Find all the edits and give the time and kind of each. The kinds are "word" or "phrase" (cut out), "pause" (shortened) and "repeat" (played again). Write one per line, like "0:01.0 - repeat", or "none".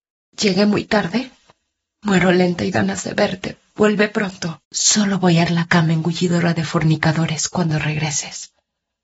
0:01.5 - pause
0:02.7 - phrase
0:04.6 - pause
0:05.5 - word